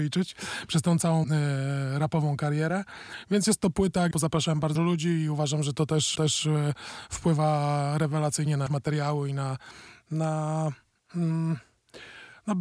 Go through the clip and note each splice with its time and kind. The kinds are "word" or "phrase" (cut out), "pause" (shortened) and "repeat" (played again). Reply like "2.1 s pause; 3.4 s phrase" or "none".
1.2 s word; 4.1 s word; 4.8 s word; 6.2 s repeat; 8.7 s word; 11.0 s pause